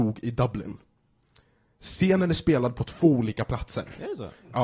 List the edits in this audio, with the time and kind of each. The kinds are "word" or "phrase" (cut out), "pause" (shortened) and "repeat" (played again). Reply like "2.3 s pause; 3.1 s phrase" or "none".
none